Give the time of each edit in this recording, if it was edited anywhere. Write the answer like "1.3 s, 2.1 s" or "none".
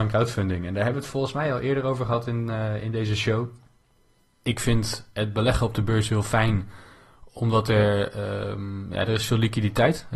none